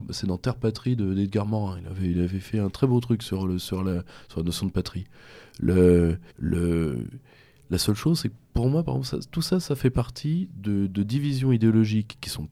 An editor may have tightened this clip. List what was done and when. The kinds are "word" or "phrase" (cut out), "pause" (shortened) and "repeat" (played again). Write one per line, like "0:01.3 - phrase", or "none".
0:06.3 - pause